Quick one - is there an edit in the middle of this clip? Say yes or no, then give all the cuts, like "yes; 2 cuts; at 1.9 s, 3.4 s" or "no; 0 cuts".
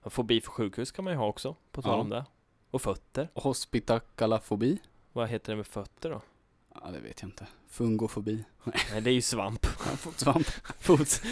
no; 0 cuts